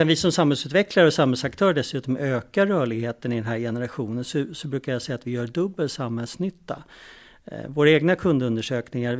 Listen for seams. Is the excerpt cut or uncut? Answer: uncut